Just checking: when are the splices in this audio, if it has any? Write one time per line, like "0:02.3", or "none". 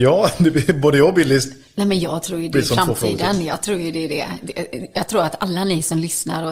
none